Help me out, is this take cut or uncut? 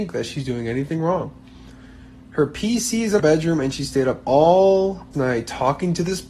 cut